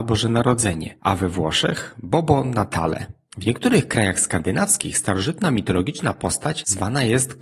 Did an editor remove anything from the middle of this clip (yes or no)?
yes